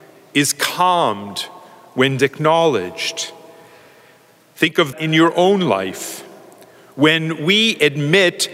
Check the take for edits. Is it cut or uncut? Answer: cut